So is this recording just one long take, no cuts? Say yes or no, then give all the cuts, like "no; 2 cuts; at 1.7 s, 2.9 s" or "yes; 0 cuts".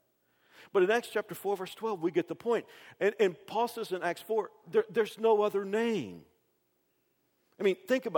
yes; 0 cuts